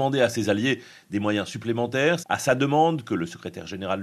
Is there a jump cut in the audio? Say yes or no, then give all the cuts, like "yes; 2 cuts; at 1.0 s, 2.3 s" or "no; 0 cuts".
yes; 1 cut; at 2.2 s